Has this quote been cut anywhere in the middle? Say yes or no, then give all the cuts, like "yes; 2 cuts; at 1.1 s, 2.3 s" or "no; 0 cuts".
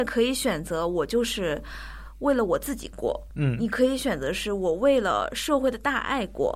no; 0 cuts